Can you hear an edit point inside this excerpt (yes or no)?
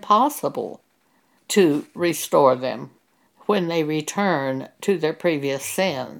no